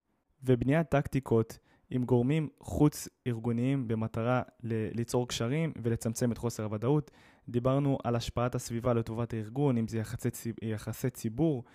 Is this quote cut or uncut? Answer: uncut